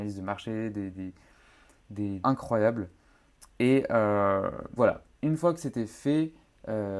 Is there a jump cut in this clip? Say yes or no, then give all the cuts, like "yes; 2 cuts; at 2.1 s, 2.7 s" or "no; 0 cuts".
yes; 3 cuts; at 0.9 s, 2.2 s, 4.8 s